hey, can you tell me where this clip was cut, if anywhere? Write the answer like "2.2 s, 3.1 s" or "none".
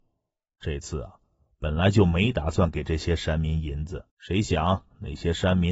4.1 s